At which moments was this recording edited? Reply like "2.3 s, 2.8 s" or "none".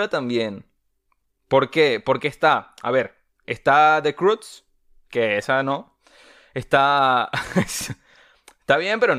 none